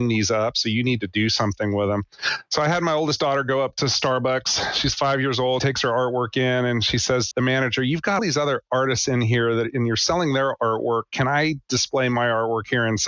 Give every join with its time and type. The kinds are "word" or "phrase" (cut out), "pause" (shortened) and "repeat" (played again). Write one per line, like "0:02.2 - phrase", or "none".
0:05.6 - word
0:07.3 - word
0:08.2 - word